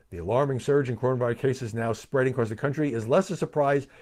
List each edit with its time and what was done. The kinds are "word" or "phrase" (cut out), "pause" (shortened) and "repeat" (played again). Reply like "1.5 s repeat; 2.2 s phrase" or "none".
none

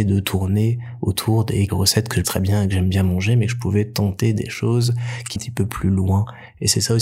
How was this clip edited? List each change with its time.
1.7 s word; 2.2 s word; 5.4 s word

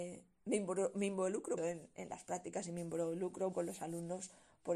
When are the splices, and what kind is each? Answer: 1.6 s word; 3.5 s word

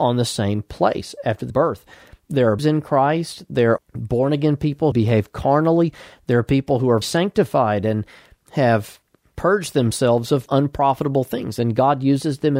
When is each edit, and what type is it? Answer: 1.5 s word; 2.6 s word; 3.8 s word; 4.9 s word; 7.0 s word; 10.5 s word

